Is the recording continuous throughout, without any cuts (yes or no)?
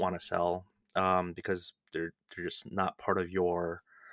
yes